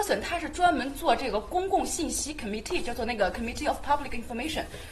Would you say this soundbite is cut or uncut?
uncut